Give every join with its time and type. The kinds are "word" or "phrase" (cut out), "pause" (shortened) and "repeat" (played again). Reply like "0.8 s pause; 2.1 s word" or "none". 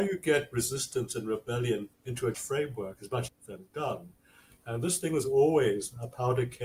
1.9 s pause; 2.3 s word; 3.3 s phrase